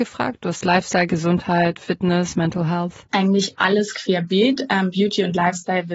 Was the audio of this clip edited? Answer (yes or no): yes